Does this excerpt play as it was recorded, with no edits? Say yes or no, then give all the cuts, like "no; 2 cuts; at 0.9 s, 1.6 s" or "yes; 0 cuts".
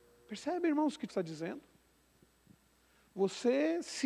no; 1 cut; at 1.1 s